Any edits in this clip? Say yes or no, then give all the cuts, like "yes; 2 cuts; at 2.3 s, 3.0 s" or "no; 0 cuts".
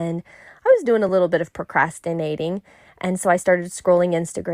no; 0 cuts